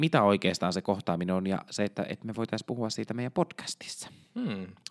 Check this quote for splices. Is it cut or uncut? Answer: uncut